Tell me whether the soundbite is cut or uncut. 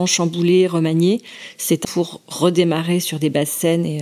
cut